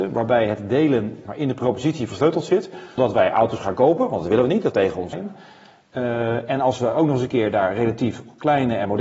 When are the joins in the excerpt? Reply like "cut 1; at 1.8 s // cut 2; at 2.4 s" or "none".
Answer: cut 1; at 1.2 s // cut 2; at 3.0 s // cut 3; at 4.7 s // cut 4; at 5.1 s